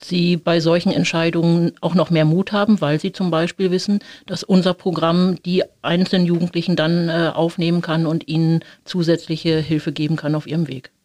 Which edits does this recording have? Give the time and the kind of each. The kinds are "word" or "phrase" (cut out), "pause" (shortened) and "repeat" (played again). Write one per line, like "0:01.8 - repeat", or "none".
none